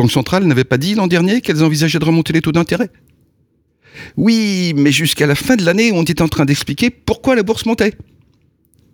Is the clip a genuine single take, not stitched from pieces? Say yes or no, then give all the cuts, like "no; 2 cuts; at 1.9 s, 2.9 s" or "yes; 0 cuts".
yes; 0 cuts